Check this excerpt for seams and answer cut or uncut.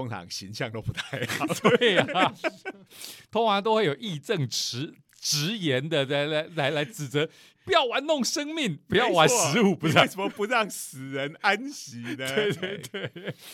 uncut